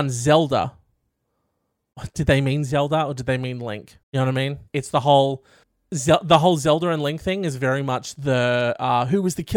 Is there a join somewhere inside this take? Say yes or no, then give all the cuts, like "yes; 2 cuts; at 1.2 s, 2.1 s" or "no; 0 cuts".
yes; 3 cuts; at 4.0 s, 4.7 s, 5.6 s